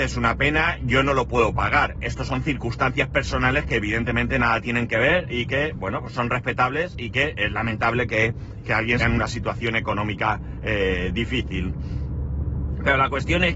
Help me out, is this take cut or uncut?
cut